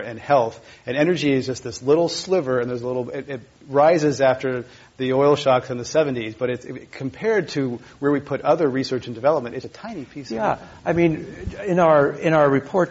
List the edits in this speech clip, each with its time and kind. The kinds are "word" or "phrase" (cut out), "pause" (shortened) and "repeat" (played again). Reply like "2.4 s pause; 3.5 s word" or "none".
9.6 s word